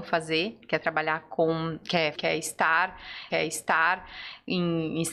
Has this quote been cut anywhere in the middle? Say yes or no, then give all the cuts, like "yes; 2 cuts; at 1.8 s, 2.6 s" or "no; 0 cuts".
yes; 2 cuts; at 2.1 s, 3.3 s